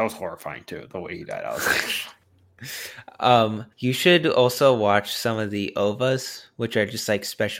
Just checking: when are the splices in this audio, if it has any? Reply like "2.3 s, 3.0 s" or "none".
3.7 s